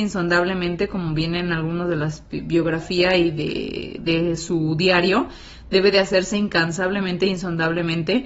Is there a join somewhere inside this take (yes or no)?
no